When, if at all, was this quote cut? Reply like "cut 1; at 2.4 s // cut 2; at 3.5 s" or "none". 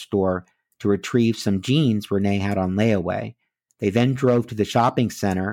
none